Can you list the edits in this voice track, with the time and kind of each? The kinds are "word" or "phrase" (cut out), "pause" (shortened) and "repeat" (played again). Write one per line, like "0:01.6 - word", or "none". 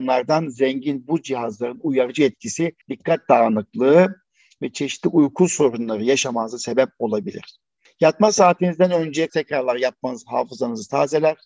0:02.8 - pause
0:09.3 - phrase